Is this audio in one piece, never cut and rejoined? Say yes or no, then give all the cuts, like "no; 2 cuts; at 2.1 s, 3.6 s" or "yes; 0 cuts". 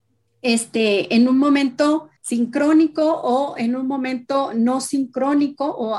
no; 1 cut; at 2.2 s